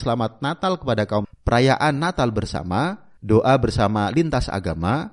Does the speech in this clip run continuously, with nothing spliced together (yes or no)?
no